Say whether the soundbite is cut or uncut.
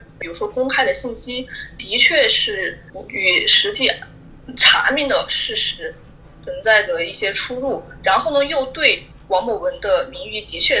uncut